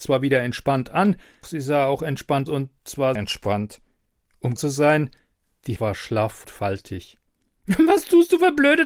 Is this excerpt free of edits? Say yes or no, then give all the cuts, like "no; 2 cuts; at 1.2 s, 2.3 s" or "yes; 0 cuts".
no; 6 cuts; at 1.4 s, 2.5 s, 3.2 s, 4.6 s, 5.8 s, 6.4 s